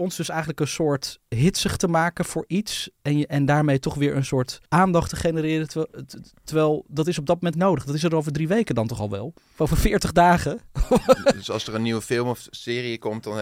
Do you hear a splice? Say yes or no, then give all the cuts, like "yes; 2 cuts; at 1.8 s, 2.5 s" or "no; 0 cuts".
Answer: yes; 4 cuts; at 1.3 s, 4.7 s, 7.5 s, 9.4 s